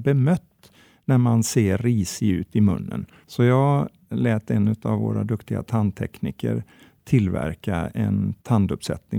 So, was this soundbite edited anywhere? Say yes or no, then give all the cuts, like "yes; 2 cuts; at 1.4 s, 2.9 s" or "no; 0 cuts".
no; 0 cuts